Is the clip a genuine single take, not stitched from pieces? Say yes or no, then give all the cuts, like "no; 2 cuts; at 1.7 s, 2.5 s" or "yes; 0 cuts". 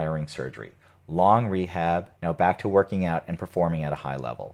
no; 1 cut; at 2.2 s